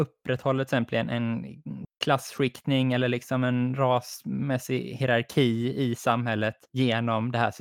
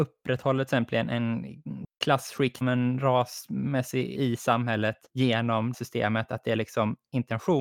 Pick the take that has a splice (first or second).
second